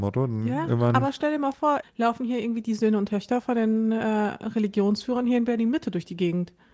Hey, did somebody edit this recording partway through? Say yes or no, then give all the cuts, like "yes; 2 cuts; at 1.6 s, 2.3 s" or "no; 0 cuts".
no; 0 cuts